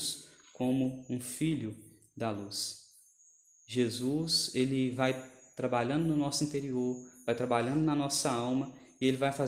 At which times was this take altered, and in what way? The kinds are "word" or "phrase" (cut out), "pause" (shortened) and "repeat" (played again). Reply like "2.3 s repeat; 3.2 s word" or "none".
none